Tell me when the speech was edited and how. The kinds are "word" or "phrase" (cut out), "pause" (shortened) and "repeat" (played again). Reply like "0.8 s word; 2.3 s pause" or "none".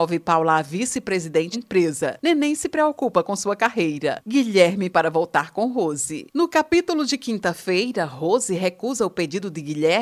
1.5 s word; 4.9 s word